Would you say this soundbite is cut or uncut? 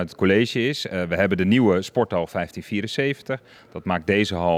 uncut